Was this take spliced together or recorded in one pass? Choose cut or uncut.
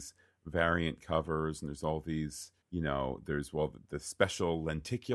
cut